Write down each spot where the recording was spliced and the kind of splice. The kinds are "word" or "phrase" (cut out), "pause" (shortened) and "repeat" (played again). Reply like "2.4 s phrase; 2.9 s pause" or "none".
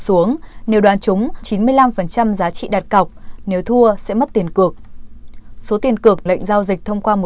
1.4 s phrase; 6.3 s word